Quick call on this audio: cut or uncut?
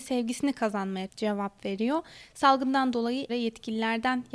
cut